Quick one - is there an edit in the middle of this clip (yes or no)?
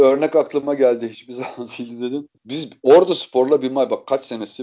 yes